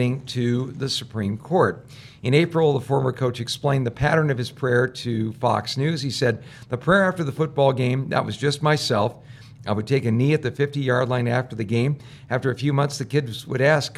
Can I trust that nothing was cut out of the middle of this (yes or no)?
yes